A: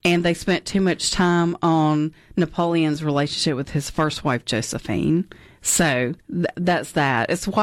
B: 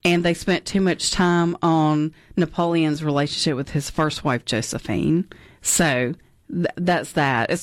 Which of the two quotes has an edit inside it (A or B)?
A